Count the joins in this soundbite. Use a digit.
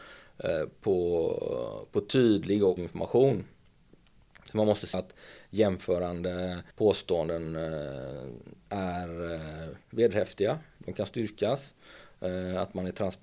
4